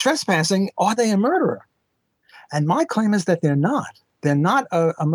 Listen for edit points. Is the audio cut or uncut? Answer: uncut